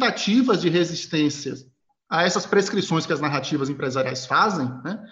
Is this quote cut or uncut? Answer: uncut